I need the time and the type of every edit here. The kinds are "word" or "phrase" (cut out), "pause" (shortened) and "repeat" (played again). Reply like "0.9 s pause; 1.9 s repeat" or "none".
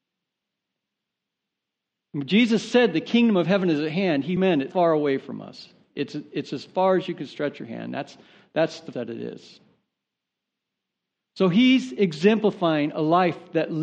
4.4 s word; 4.7 s word; 8.9 s word